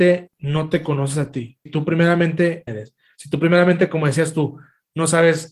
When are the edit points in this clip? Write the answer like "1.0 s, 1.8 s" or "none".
1.7 s, 2.7 s